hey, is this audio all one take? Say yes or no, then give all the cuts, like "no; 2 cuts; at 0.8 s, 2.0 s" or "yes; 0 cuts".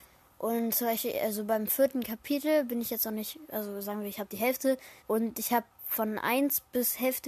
no; 1 cut; at 5.0 s